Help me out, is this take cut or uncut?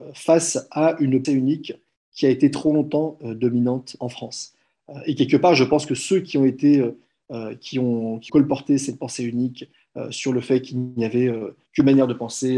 cut